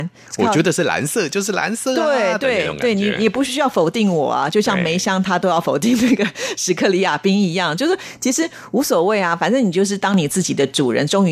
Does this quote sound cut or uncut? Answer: uncut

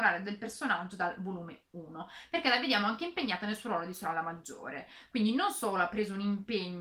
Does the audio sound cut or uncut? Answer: uncut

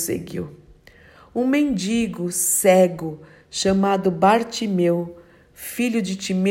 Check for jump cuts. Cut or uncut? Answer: uncut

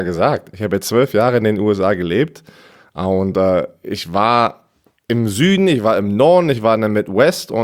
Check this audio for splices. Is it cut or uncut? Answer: uncut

